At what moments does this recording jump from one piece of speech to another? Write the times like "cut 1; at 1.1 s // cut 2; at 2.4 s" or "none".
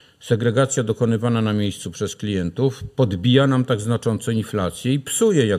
none